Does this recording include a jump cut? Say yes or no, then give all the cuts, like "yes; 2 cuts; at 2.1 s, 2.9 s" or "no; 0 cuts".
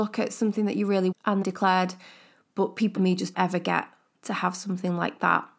yes; 4 cuts; at 1.1 s, 1.4 s, 3.0 s, 3.3 s